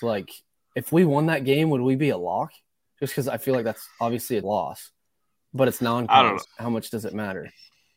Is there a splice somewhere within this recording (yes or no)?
yes